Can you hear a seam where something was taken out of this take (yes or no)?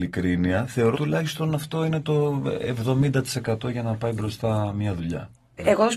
yes